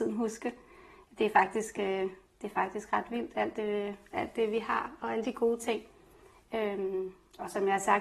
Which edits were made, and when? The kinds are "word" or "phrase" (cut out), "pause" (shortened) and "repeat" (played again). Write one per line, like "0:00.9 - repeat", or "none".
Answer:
none